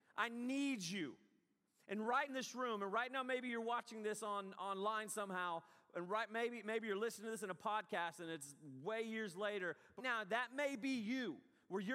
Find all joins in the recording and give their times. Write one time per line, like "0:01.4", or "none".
0:02.3
0:10.0

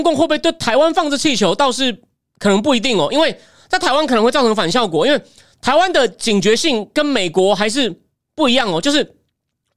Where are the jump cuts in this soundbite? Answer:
none

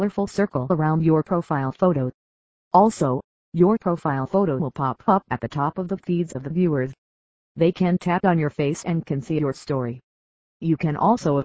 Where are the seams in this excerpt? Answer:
none

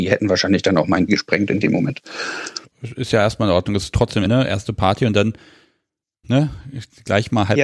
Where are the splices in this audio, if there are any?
0:01.1
0:04.2
0:06.2

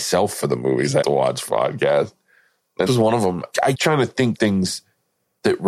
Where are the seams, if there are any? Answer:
0:01.0
0:01.5
0:02.9
0:03.7
0:04.3

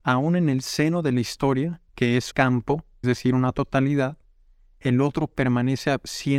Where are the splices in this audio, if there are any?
0:01.9
0:02.3
0:03.0

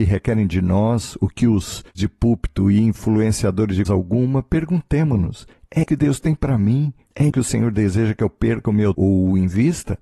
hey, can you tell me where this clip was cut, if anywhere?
0:01.9
0:03.8
0:05.8
0:07.3
0:08.9

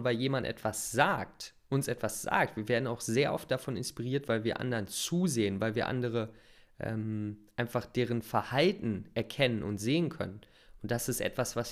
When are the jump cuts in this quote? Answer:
none

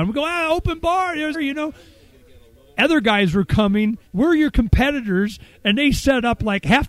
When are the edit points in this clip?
0:01.3
0:04.1

